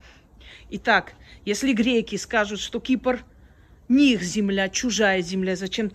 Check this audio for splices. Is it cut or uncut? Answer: uncut